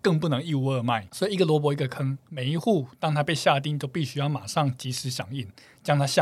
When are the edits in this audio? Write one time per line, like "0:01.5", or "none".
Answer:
none